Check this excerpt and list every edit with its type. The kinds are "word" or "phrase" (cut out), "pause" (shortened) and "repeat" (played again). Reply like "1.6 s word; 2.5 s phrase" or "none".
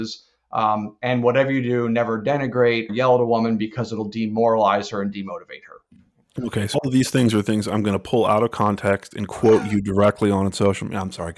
2.9 s word; 6.7 s word